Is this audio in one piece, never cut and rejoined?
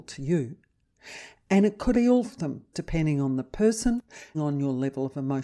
no; 4 cuts; at 1.9 s, 2.2 s, 2.7 s, 4.3 s

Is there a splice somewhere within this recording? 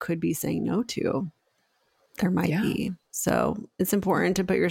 no; 0 cuts

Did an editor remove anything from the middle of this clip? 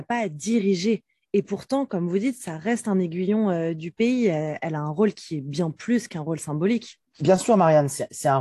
no; 0 cuts

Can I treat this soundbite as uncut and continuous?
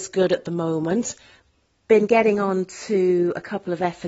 yes; 0 cuts

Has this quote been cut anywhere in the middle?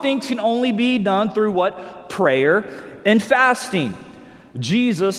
no; 0 cuts

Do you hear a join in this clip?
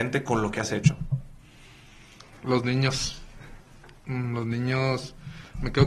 no; 0 cuts

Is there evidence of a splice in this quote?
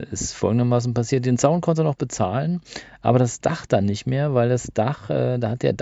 no; 0 cuts

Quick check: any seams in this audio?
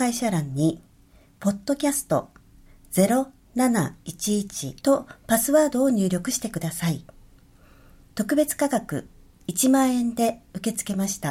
yes; 1 cut; at 4.8 s

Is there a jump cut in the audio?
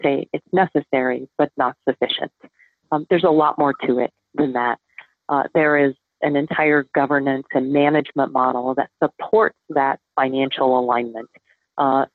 no; 0 cuts

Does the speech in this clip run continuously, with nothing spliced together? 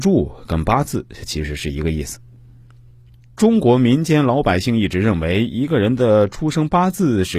yes; 0 cuts

